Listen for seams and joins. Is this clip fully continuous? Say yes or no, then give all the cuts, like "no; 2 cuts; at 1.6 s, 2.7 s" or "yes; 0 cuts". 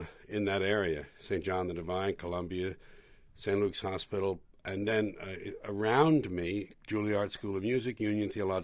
yes; 0 cuts